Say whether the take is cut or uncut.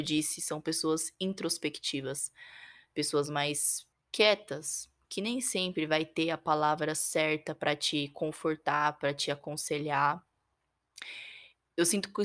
cut